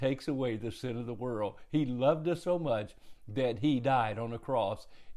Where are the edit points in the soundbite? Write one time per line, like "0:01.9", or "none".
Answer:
none